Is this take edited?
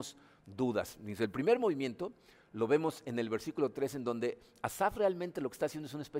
no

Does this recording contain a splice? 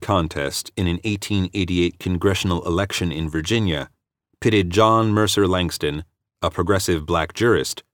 no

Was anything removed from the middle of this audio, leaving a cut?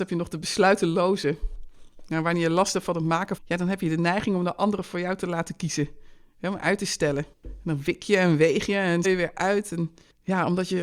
yes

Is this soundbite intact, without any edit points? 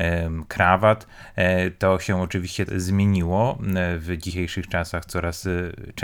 no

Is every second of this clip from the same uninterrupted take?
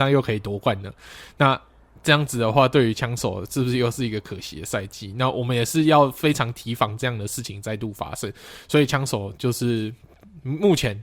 yes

